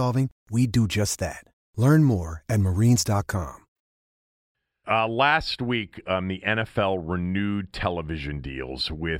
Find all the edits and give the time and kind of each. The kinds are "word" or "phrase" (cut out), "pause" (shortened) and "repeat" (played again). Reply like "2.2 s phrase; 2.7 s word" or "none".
none